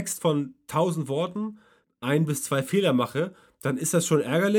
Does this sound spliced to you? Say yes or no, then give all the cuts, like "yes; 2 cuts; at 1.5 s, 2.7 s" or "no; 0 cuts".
yes; 1 cut; at 1.8 s